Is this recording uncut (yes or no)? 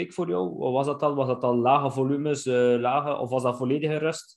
yes